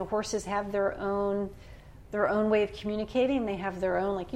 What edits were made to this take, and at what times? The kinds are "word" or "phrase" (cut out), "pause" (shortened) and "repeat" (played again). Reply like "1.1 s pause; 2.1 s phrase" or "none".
none